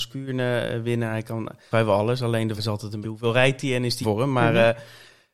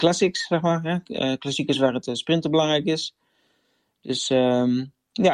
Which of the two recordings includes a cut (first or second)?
first